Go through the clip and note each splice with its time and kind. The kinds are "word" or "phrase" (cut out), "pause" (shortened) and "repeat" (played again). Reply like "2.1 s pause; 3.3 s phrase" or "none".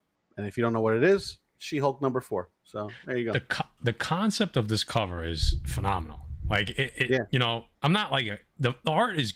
2.6 s pause; 7.7 s pause